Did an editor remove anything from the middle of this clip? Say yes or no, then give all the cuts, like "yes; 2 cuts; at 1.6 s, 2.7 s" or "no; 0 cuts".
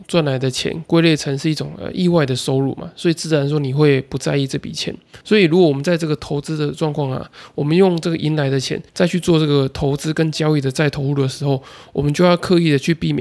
yes; 2 cuts; at 5.2 s, 8.9 s